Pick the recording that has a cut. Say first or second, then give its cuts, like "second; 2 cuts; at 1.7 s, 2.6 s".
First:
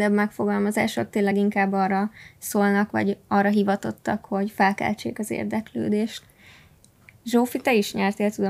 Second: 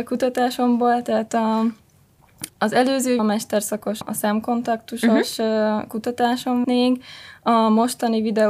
second; 4 cuts; at 2.5 s, 3.2 s, 4.0 s, 6.6 s